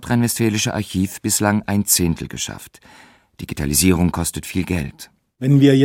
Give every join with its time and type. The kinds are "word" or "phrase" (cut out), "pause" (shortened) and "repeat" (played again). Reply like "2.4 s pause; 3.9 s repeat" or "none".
none

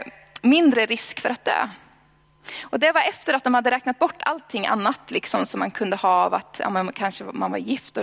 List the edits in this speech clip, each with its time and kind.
none

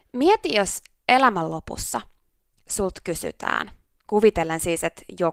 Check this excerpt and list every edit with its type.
none

